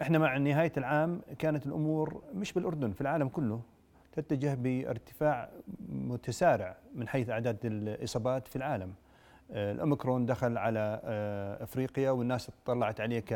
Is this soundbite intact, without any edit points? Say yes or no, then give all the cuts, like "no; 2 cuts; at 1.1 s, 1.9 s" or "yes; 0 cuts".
yes; 0 cuts